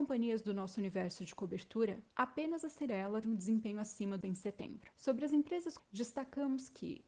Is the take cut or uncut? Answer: cut